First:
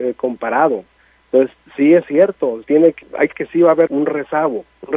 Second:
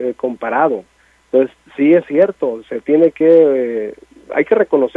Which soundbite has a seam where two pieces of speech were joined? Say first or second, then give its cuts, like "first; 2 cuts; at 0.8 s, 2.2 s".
first; 4 cuts; at 2.6 s, 3.0 s, 3.3 s, 3.9 s